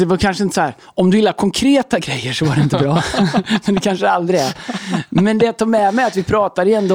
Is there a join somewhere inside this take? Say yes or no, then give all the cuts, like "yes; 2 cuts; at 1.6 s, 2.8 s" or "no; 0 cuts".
no; 0 cuts